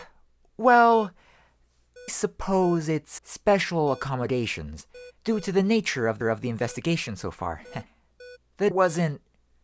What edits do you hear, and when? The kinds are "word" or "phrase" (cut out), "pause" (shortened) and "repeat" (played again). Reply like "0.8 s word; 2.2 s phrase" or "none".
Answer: 2.1 s word; 3.2 s word; 5.2 s pause; 6.2 s repeat; 7.9 s pause; 8.7 s word

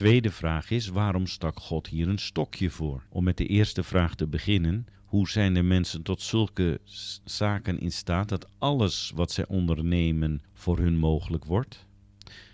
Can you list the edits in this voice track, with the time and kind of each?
3.1 s pause; 4.9 s pause; 7.2 s pause; 10.4 s pause

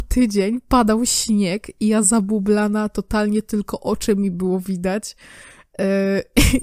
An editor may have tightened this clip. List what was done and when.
none

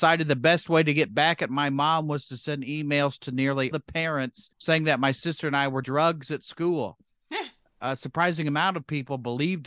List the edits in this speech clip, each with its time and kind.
3.7 s word; 4.5 s pause; 5.8 s word

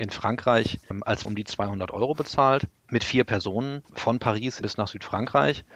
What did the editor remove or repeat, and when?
1.2 s word; 2.8 s pause; 4.6 s word

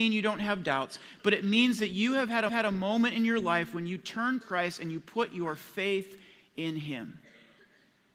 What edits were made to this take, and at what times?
2.5 s repeat; 4.4 s word

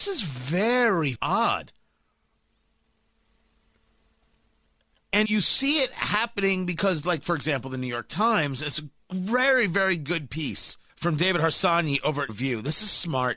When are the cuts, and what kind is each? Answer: 1.2 s word; 5.3 s word; 10.9 s pause; 12.3 s word

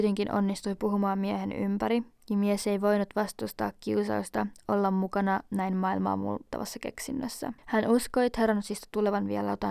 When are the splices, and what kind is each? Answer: 7.6 s pause

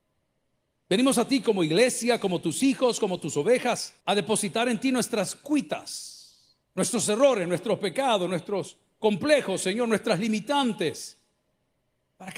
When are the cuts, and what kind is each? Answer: 4.0 s pause; 6.6 s pause

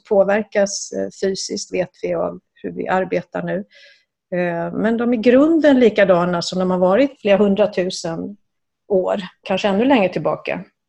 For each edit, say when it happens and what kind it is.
7.2 s word; 9.4 s word

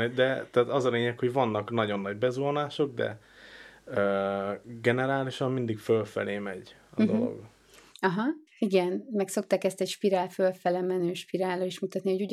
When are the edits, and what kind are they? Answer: 8.5 s pause

